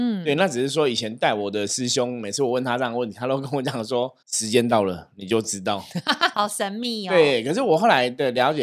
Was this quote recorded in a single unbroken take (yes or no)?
no